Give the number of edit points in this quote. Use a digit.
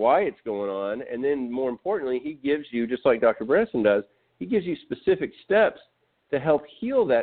0